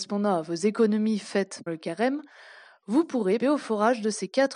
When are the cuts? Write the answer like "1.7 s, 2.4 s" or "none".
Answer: 1.7 s, 3.4 s